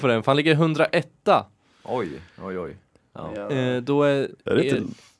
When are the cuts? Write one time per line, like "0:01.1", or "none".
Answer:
none